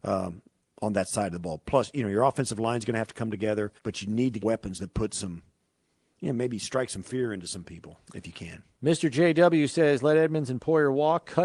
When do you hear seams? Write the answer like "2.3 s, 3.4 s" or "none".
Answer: 3.8 s, 4.4 s

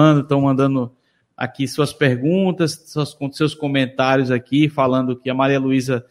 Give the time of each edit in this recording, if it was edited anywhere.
none

